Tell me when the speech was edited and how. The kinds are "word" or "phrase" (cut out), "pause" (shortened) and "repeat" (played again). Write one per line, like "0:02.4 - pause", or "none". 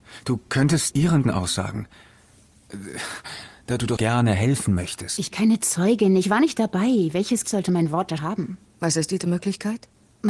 0:00.9 - word
0:01.2 - word
0:04.0 - word
0:05.3 - word
0:07.4 - word
0:08.2 - word
0:09.2 - word